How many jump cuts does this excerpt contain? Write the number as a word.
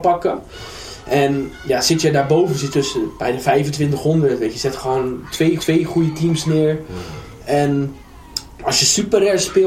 two